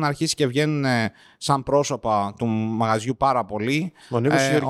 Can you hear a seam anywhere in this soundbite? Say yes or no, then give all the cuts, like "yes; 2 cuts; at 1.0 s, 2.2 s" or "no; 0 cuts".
no; 0 cuts